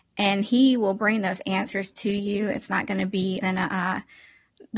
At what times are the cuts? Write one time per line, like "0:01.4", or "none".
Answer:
0:03.4